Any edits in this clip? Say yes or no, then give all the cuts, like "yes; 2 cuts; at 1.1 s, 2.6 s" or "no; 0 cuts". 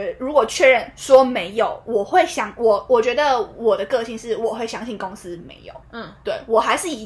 yes; 1 cut; at 5.8 s